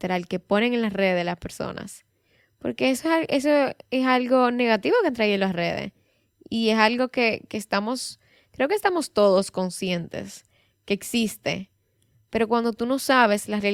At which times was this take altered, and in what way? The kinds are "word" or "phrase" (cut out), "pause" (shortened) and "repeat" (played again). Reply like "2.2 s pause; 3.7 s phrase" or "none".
none

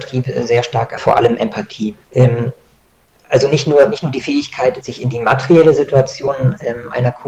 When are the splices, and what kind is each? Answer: 1.0 s phrase; 2.0 s pause; 4.8 s word

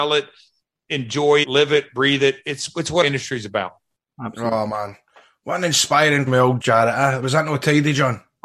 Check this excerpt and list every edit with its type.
1.4 s word; 3.0 s word; 6.3 s word; 6.6 s word

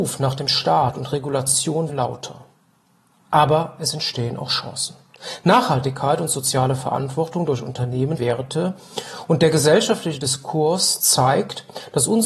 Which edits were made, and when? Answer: 1.9 s word; 8.2 s word

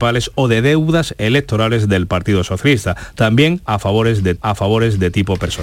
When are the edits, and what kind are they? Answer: 4.4 s repeat

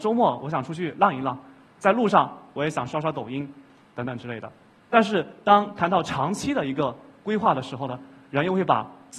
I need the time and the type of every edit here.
none

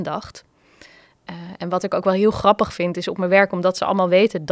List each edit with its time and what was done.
none

